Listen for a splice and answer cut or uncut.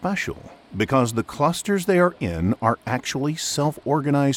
uncut